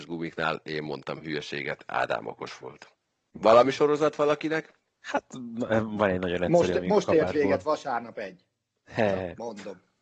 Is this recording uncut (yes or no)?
yes